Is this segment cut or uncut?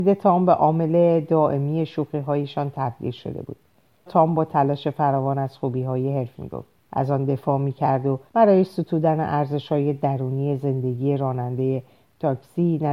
cut